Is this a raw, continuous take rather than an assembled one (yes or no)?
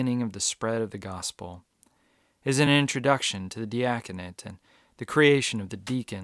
yes